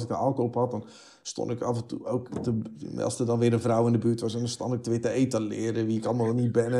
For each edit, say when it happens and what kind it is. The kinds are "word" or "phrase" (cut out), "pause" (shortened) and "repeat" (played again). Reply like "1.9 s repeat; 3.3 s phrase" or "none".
none